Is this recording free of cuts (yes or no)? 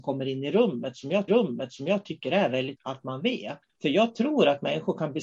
no